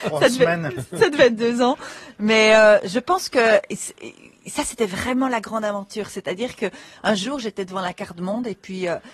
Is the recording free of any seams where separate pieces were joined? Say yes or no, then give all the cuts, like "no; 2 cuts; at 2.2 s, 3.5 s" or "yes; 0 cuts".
yes; 0 cuts